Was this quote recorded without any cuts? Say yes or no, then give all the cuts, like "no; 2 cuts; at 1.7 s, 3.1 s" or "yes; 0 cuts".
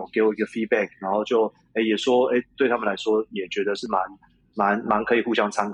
yes; 0 cuts